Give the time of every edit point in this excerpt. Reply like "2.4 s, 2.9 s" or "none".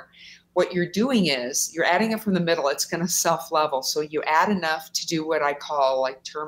none